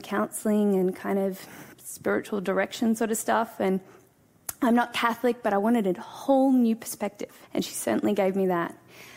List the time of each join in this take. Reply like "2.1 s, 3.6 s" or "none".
1.7 s, 7.4 s